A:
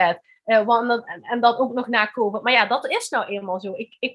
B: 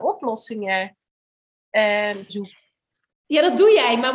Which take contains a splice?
B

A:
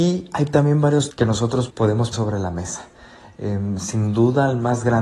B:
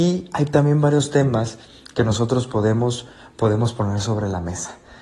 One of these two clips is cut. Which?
A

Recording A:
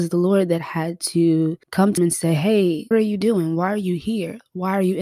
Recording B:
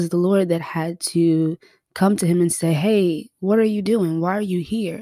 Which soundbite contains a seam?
A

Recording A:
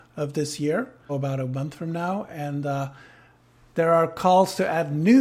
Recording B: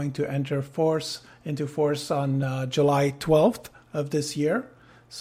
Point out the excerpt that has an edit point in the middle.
A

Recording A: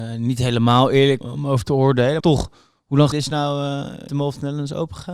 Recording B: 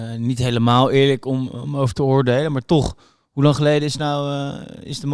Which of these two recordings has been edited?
A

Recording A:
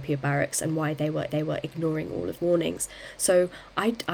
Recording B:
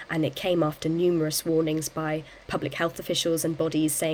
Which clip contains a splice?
A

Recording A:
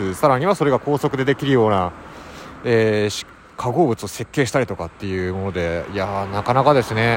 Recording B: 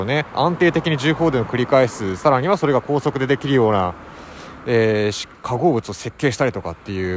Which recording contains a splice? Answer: B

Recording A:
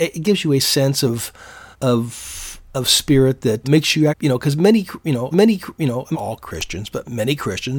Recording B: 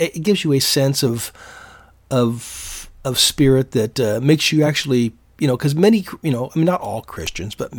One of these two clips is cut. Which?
A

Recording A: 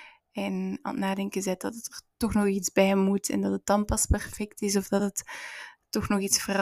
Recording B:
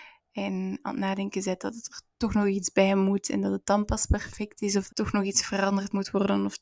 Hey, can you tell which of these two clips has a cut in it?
B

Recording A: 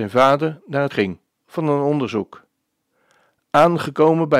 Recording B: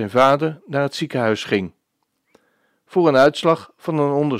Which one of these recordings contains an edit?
A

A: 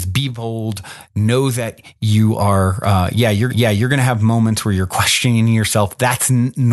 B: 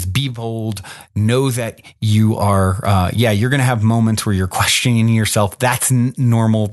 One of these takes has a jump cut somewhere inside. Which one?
A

